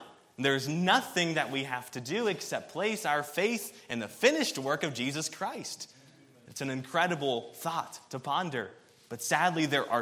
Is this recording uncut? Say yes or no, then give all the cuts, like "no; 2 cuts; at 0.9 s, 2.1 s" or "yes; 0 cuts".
yes; 0 cuts